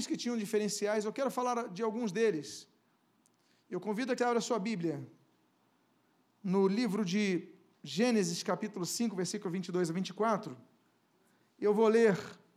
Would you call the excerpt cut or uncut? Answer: cut